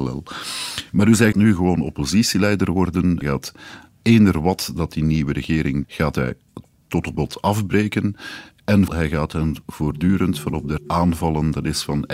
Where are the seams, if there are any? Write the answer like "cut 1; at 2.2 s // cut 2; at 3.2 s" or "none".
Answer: cut 1; at 1.3 s // cut 2; at 3.2 s // cut 3; at 5.8 s // cut 4; at 7.1 s // cut 5; at 8.9 s // cut 6; at 10.8 s